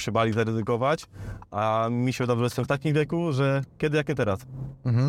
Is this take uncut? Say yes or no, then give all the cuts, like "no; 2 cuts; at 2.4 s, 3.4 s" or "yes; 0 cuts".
yes; 0 cuts